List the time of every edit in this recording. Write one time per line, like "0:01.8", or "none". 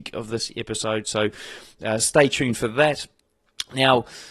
none